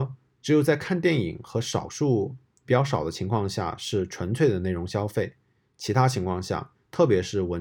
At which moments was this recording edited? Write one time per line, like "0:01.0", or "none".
0:02.6